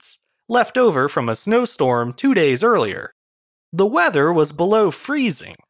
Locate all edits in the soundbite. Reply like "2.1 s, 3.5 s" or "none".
none

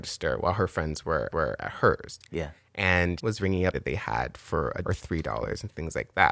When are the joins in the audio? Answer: 1.3 s, 3.2 s, 3.7 s, 4.8 s

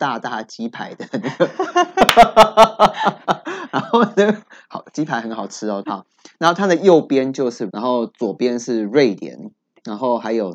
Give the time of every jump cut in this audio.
5.8 s, 7.7 s

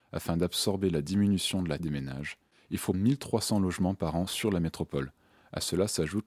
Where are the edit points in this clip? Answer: 1.8 s, 2.9 s

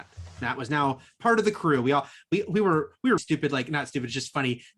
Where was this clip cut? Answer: 3.2 s

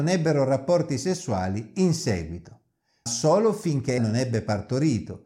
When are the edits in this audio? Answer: 3.1 s, 4.0 s

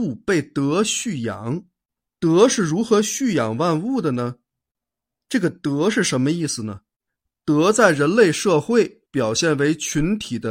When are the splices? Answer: 9.1 s

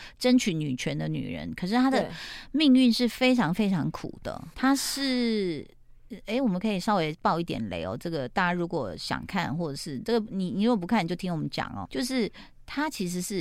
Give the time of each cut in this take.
4.5 s, 11.8 s

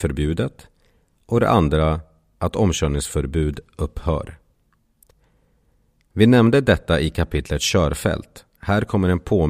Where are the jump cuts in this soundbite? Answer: none

